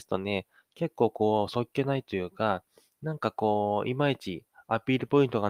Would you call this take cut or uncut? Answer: uncut